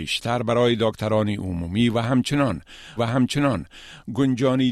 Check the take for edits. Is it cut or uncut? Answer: cut